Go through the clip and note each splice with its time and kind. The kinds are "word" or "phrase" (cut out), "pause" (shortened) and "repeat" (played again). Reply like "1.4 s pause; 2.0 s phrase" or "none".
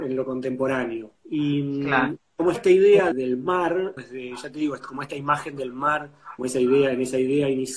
1.1 s pause; 2.5 s word; 3.1 s word; 4.0 s word; 6.4 s word